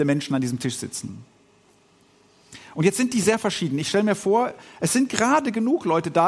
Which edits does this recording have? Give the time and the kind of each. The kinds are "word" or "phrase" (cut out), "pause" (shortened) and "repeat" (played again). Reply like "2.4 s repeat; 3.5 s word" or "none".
none